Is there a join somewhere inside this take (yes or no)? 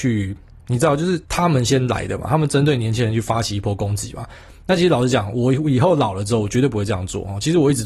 yes